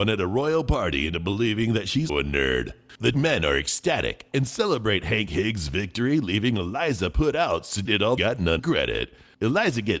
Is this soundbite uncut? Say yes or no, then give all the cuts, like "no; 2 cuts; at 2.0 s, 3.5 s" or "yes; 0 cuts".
no; 5 cuts; at 2.1 s, 3.1 s, 7.9 s, 8.2 s, 8.6 s